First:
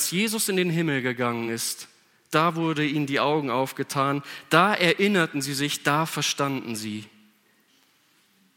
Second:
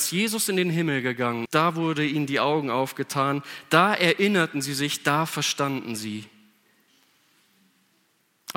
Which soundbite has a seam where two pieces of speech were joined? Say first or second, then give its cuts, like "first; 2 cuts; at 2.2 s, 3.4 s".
second; 1 cut; at 1.5 s